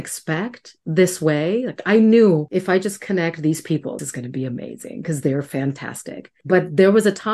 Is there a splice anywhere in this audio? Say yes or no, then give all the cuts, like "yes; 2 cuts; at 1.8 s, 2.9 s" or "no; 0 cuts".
yes; 1 cut; at 4.0 s